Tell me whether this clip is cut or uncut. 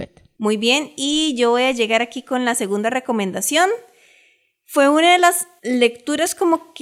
uncut